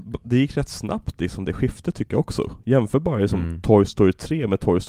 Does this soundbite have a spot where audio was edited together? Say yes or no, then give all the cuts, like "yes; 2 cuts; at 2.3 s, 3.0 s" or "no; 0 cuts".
no; 0 cuts